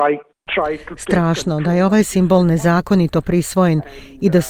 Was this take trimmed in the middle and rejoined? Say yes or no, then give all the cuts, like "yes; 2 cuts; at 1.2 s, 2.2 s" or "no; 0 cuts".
no; 0 cuts